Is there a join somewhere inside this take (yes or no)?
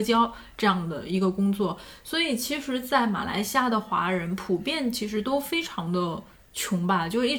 no